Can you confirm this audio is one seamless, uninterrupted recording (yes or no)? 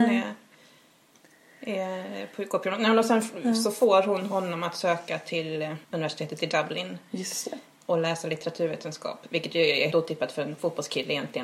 no